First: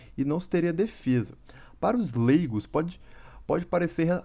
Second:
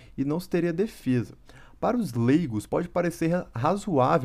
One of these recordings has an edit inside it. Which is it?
second; 1 cut; at 2.7 s

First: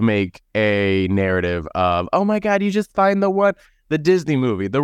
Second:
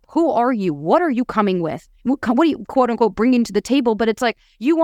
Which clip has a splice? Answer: second; 1 cut; at 2.0 s

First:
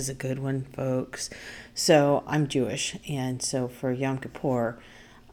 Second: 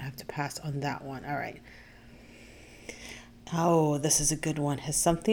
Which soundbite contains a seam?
first; 1 cut; at 2.3 s

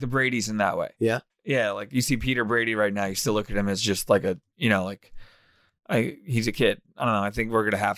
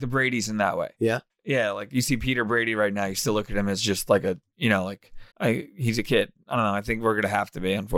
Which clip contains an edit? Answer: second; 1 cut; at 5.3 s

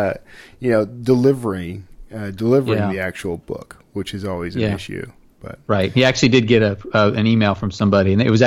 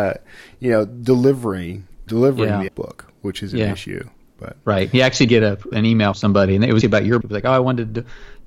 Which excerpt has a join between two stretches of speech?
second; 8 cuts; at 2.1 s, 2.7 s, 3.5 s, 5.3 s, 5.7 s, 6.1 s, 6.8 s, 7.2 s

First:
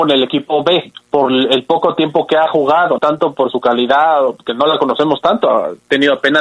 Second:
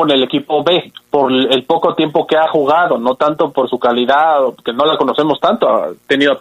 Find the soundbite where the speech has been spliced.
first; 1 cut; at 3.0 s

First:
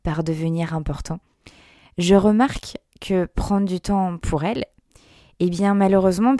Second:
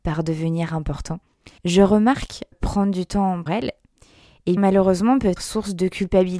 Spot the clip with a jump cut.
second; 5 cuts; at 1.6 s, 2.5 s, 3.5 s, 4.6 s, 5.4 s

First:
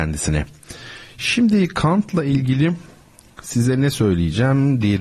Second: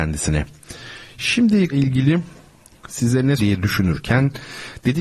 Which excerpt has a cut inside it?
second; 2 cuts; at 1.7 s, 3.4 s

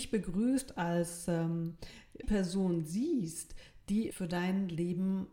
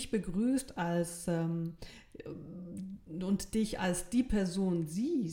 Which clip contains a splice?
first; 2 cuts; at 2.2 s, 4.1 s

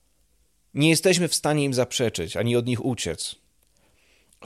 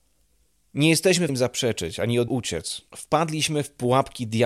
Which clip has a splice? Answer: second; 3 cuts; at 1.3 s, 2.3 s, 2.9 s

